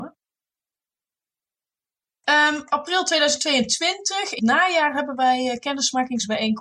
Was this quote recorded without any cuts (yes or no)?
no